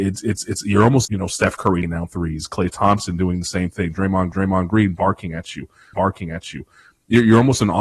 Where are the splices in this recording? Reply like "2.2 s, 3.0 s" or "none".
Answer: 1.0 s, 1.8 s, 4.3 s, 5.9 s